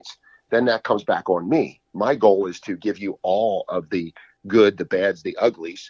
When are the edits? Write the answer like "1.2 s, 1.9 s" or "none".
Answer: none